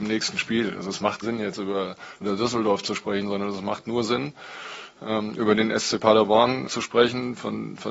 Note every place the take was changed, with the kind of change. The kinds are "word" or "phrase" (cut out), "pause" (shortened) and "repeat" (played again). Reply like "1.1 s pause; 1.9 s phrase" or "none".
1.2 s word; 2.2 s word; 6.7 s word